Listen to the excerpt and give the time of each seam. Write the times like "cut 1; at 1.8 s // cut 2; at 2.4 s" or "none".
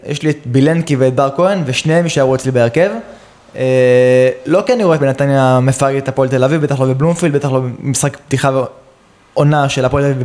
cut 1; at 5.0 s